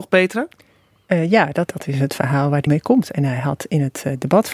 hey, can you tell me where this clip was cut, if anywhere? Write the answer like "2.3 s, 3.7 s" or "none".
1.7 s, 2.7 s